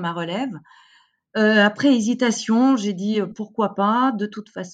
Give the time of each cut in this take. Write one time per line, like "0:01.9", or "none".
none